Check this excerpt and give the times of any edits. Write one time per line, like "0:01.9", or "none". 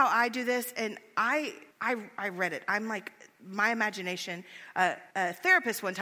0:01.7
0:05.1